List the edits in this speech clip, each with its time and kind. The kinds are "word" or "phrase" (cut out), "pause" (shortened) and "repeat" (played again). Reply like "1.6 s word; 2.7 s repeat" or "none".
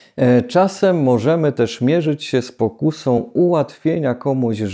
none

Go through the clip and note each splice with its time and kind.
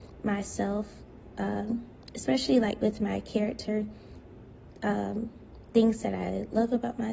none

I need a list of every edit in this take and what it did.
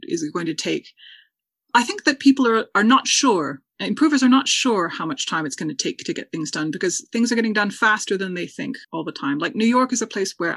8.8 s pause

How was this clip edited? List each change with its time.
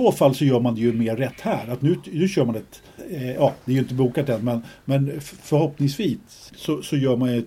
3.0 s word; 6.5 s word

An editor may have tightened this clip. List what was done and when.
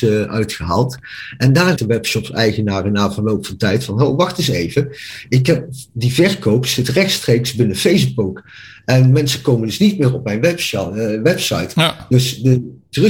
1.8 s word

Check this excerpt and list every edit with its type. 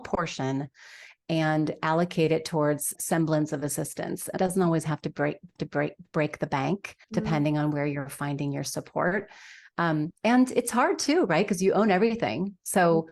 2.9 s word; 4.4 s word; 5.6 s repeat; 7.0 s pause; 10.2 s pause

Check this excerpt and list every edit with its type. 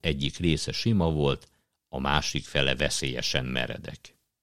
none

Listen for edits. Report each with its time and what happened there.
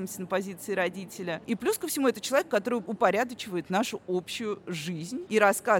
none

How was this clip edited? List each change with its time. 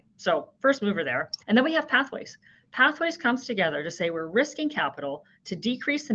1.4 s pause

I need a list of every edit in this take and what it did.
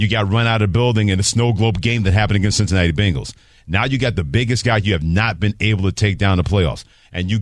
none

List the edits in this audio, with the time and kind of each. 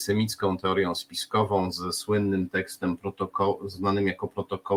none

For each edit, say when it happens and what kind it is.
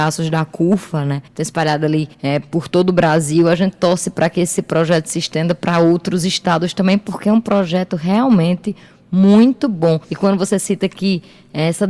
1.3 s pause; 2.1 s pause; 10.0 s pause

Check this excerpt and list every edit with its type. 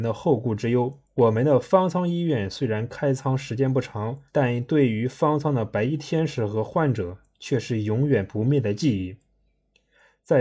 1.0 s pause; 4.3 s pause

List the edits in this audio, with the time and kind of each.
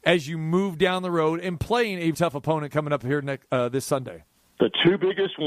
2.1 s word; 4.4 s pause

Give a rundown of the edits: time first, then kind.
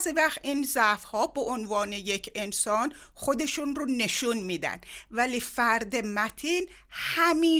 none

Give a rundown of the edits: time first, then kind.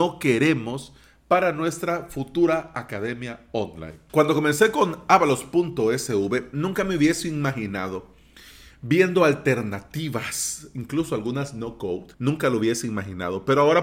12.1 s pause

